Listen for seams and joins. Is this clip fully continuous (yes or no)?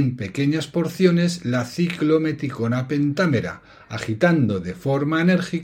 yes